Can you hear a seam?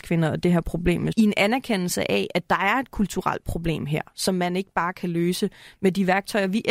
yes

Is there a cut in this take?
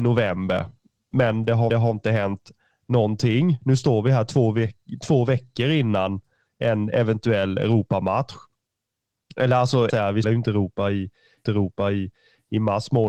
yes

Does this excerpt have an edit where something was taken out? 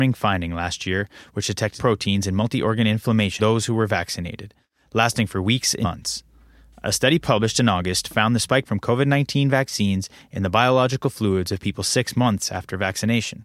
yes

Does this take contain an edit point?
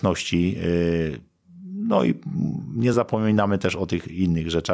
no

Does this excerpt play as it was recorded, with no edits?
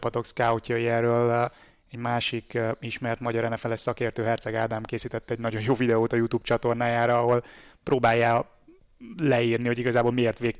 yes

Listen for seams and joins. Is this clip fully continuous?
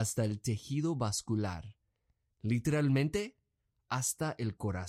yes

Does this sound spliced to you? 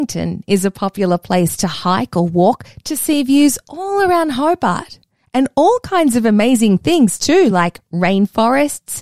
no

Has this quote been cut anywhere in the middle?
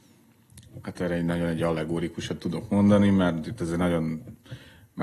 no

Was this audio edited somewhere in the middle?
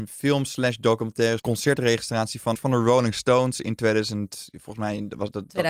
yes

